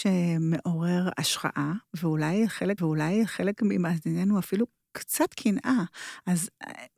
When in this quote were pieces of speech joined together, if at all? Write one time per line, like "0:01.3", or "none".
0:02.8